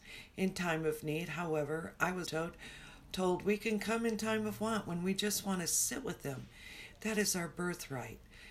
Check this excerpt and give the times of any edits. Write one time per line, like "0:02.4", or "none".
0:02.2